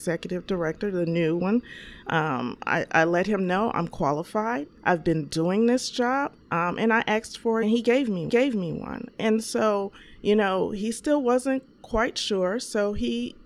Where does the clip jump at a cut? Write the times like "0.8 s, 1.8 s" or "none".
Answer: 4.8 s, 6.4 s, 7.6 s, 8.3 s